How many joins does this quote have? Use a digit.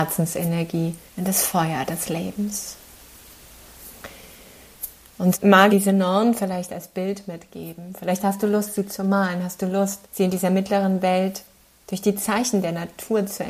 4